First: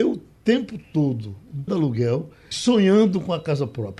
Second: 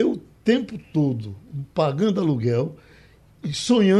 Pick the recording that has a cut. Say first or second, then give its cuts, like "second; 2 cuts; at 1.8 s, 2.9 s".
first; 2 cuts; at 1.7 s, 2.5 s